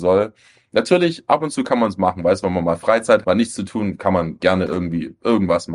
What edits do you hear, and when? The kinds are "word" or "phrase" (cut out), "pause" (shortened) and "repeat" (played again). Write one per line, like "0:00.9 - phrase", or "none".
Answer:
0:03.2 - word